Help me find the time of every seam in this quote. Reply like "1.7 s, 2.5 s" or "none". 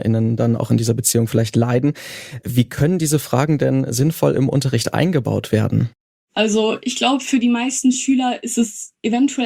none